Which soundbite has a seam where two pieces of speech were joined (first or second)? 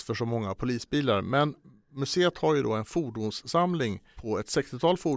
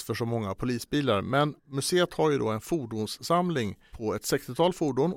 second